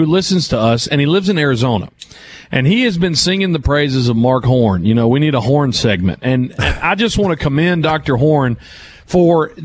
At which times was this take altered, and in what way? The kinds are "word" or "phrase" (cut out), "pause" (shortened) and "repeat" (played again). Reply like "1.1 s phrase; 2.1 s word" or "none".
none